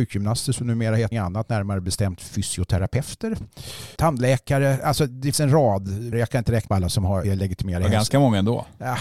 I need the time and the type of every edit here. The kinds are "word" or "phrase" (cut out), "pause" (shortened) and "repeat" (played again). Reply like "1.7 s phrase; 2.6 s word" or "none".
1.1 s word; 4.0 s word; 5.3 s word; 6.1 s word; 6.7 s word; 7.2 s word